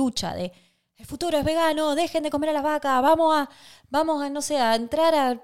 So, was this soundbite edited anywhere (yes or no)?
no